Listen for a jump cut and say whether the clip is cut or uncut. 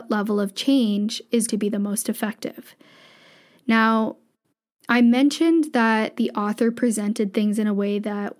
cut